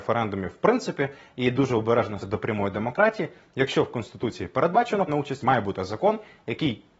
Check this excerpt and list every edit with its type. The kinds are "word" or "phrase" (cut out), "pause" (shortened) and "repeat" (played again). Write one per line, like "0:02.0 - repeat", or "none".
0:02.2 - word
0:05.1 - word
0:05.4 - phrase